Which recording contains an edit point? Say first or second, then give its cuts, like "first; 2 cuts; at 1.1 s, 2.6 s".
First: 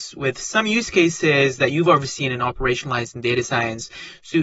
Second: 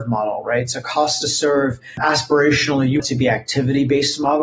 second; 1 cut; at 3.0 s